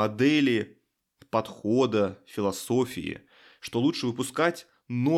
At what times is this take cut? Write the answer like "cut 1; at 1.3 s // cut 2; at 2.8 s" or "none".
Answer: none